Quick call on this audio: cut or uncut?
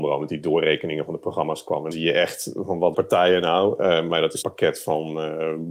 cut